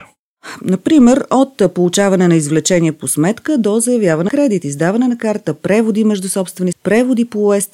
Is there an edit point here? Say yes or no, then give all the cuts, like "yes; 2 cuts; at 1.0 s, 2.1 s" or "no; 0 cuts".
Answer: yes; 2 cuts; at 4.3 s, 6.7 s